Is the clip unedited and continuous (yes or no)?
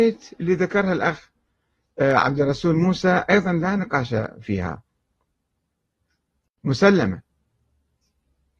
yes